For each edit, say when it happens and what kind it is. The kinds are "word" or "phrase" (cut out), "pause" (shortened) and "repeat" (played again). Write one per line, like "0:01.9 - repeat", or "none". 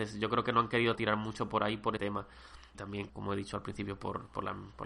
0:00.9 - word
0:02.0 - word
0:02.7 - word
0:03.1 - word